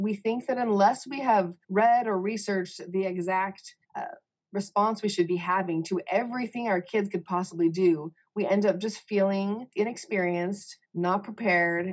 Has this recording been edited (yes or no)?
yes